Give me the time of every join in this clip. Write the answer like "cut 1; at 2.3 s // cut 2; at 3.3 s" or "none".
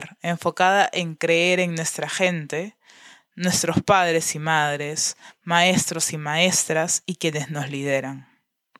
none